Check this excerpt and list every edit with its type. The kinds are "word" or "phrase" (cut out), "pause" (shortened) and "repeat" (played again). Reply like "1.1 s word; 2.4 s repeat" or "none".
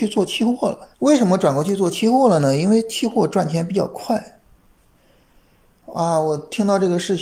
0.9 s pause